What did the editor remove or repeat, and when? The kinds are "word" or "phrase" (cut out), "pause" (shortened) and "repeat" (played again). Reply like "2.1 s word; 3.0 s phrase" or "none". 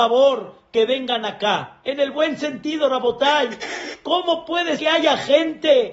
4.8 s word